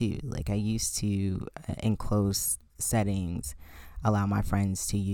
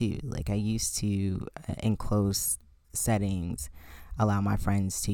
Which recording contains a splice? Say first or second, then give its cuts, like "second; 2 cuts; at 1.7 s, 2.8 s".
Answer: first; 1 cut; at 2.7 s